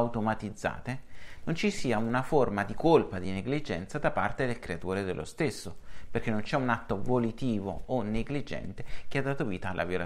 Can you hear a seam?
no; 0 cuts

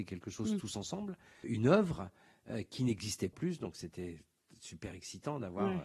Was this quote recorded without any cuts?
no; 2 cuts; at 1.4 s, 3.3 s

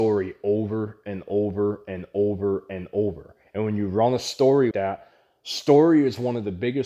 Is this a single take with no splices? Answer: no; 1 cut; at 4.7 s

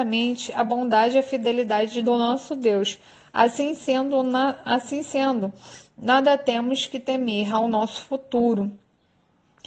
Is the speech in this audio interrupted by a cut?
no; 0 cuts

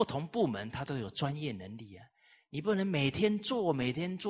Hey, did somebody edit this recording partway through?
no; 0 cuts

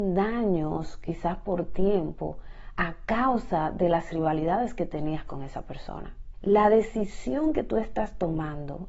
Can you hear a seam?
no; 0 cuts

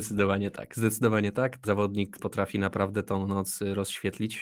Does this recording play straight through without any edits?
no; 2 cuts; at 1.6 s, 2.2 s

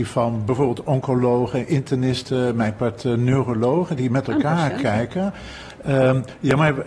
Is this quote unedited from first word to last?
yes; 0 cuts

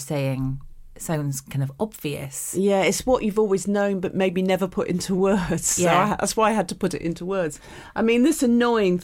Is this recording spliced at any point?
no; 0 cuts

